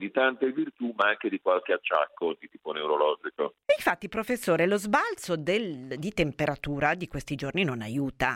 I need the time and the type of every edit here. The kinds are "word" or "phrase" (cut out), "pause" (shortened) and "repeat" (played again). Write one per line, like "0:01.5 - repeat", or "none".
none